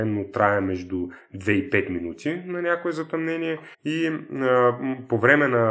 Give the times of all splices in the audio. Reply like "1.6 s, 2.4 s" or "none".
3.7 s